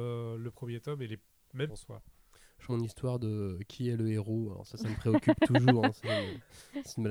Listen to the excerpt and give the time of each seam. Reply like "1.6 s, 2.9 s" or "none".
1.7 s, 2.7 s